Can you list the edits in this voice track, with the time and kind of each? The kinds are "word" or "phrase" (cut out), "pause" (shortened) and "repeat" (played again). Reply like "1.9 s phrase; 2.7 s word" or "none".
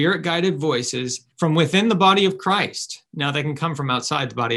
1.3 s pause; 3.1 s pause